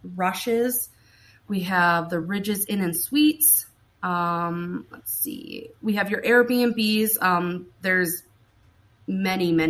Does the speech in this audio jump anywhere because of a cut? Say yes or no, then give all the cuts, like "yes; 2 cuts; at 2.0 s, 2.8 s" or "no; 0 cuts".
no; 0 cuts